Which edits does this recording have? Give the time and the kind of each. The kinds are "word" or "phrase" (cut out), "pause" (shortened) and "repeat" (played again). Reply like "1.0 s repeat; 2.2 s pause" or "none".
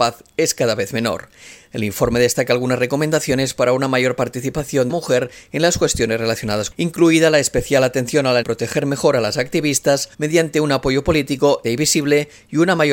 4.9 s phrase; 6.7 s phrase; 8.4 s phrase; 10.1 s pause; 11.6 s phrase